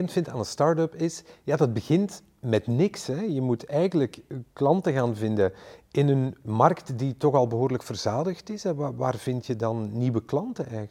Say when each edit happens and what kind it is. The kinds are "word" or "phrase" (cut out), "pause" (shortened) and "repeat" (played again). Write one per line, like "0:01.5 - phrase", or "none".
none